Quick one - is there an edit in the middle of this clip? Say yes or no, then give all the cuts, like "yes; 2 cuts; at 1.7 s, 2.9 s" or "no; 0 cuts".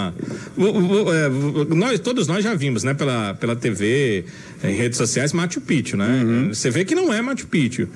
no; 0 cuts